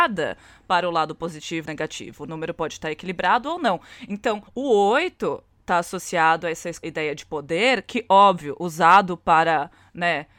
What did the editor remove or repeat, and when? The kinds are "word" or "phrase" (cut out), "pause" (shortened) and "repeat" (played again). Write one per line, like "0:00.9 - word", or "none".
0:01.7 - phrase
0:04.5 - pause
0:06.8 - word